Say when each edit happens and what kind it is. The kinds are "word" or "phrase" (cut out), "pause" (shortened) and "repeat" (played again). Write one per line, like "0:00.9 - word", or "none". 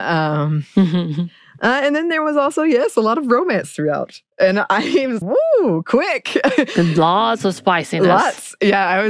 0:05.2 - word